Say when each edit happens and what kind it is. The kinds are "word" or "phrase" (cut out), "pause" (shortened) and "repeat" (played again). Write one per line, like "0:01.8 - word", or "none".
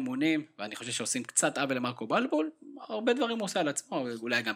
none